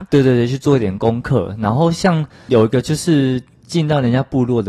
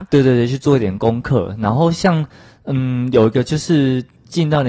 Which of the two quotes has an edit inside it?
first; 1 cut; at 2.5 s

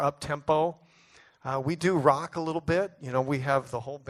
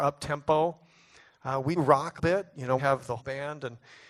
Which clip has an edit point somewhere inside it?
second; 4 cuts; at 1.8 s, 2.2 s, 2.8 s, 3.2 s

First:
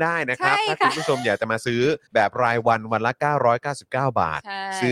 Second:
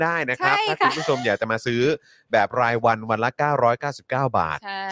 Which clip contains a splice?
first; 1 cut; at 2.1 s

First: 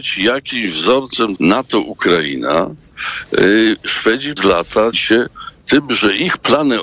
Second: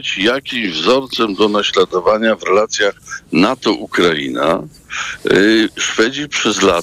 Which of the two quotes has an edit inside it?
first; 3 cuts; at 1.4 s, 4.4 s, 4.9 s

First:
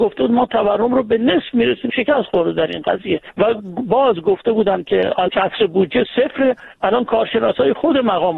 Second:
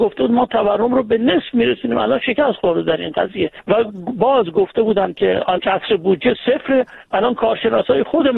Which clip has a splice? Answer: first; 1 cut; at 1.9 s

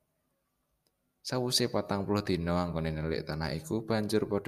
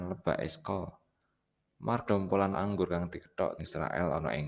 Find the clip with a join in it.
second; 3 cuts; at 2.1 s, 2.5 s, 3.6 s

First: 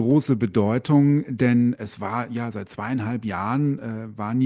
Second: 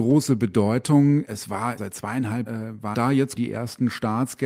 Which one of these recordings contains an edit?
second; 5 cuts; at 1.2 s, 1.8 s, 2.5 s, 2.9 s, 3.4 s

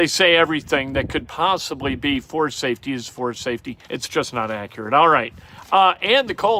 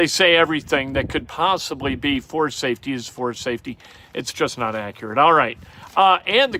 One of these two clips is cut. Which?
first; 1 cut; at 3.8 s

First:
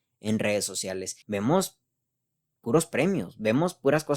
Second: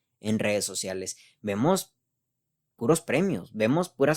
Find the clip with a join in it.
first; 1 cut; at 1.2 s

